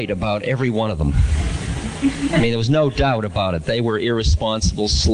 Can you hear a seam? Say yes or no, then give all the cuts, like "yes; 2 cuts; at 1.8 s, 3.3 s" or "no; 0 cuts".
no; 0 cuts